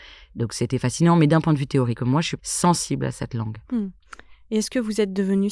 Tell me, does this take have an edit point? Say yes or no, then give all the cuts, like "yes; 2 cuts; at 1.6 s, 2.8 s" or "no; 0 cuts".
yes; 3 cuts; at 2.0 s, 2.4 s, 3.6 s